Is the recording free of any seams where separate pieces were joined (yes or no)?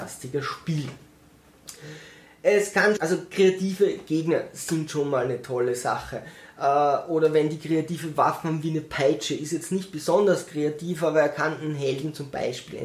no